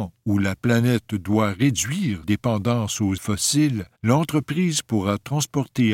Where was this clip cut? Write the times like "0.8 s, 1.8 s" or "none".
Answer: 2.2 s, 3.2 s, 3.9 s